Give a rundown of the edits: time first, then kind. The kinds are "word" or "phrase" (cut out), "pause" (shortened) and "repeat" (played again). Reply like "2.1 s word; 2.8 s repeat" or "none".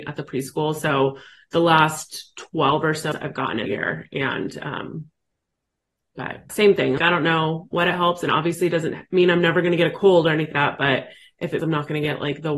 3.1 s word; 3.7 s word; 6.5 s word; 7.0 s word; 10.5 s word; 11.6 s word

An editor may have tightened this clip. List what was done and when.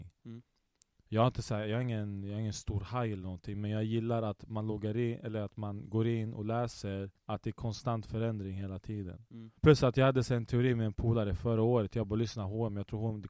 7.2 s pause; 9.6 s pause

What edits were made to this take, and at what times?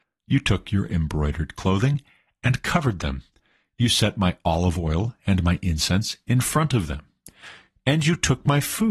none

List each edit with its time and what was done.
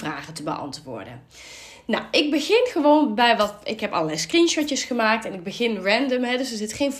none

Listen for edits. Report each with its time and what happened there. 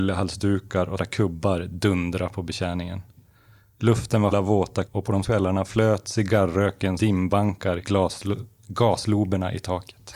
1.0 s word; 4.3 s word; 4.9 s word; 5.2 s word; 7.0 s word; 7.8 s word

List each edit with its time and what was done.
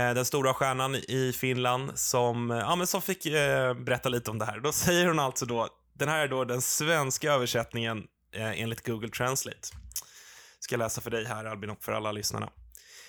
none

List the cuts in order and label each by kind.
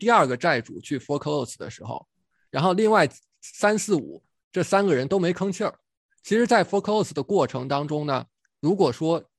none

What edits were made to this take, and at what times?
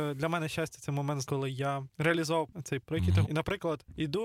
1.2 s word; 2.8 s word; 3.2 s word

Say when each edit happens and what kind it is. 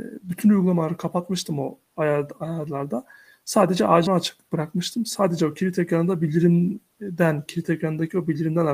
4.1 s word

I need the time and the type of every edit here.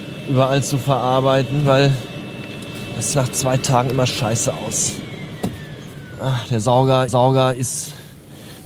3.1 s phrase; 4.1 s word; 7.1 s repeat

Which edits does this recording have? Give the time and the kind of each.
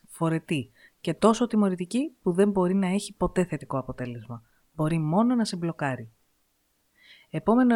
none

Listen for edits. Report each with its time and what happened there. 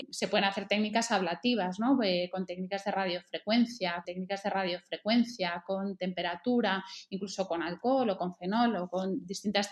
4.0 s repeat

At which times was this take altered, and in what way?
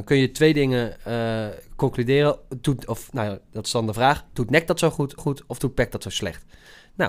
5.2 s repeat

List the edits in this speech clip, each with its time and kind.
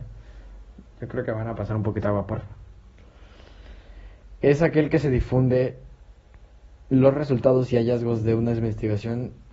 none

